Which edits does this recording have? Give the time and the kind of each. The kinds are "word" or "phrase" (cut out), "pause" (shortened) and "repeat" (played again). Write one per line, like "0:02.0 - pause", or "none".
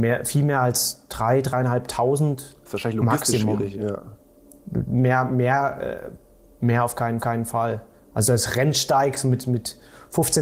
0:07.2 - repeat